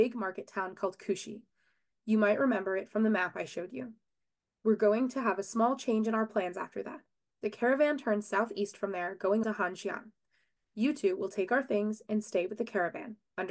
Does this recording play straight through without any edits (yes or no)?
no